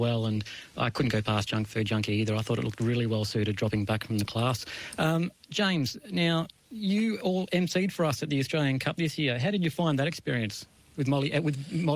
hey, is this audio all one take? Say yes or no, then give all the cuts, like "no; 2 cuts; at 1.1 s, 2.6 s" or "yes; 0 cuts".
yes; 0 cuts